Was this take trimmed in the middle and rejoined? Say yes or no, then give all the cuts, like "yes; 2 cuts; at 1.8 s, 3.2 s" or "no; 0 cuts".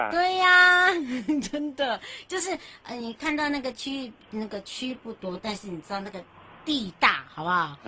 no; 0 cuts